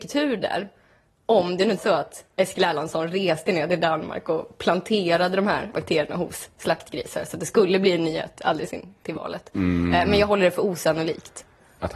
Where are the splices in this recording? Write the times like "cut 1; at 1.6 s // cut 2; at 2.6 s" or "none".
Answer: cut 1; at 1.8 s // cut 2; at 5.7 s